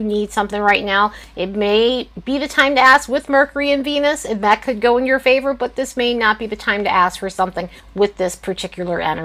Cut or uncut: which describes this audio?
uncut